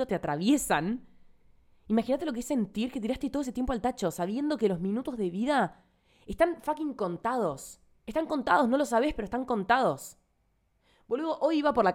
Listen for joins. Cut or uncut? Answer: uncut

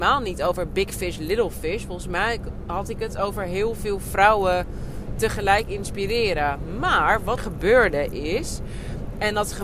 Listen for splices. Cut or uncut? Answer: cut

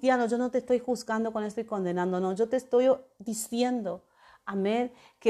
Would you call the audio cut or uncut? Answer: uncut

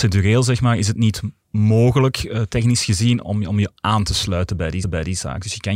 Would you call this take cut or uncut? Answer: cut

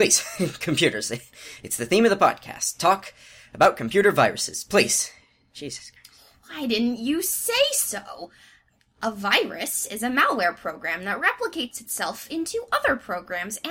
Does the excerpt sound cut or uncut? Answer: uncut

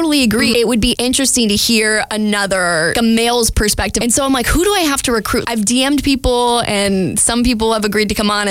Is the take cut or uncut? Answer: uncut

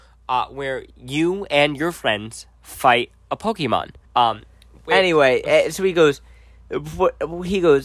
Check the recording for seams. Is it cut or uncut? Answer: cut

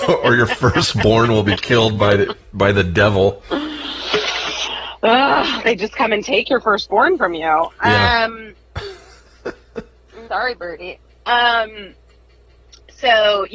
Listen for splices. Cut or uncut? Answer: cut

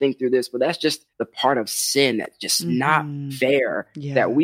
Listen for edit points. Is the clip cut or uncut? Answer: cut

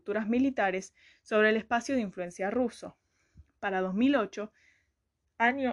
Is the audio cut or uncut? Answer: uncut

